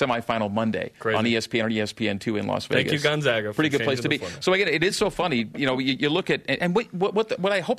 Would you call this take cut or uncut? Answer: uncut